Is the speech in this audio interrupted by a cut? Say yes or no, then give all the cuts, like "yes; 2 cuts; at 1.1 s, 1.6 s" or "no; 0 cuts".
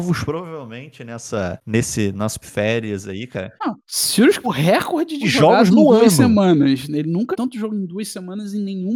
yes; 5 cuts; at 2.4 s, 3.6 s, 4.4 s, 5.2 s, 7.3 s